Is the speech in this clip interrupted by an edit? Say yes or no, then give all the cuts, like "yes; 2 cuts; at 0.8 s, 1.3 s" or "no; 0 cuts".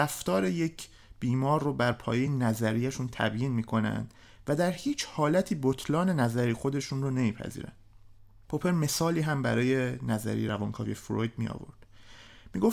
no; 0 cuts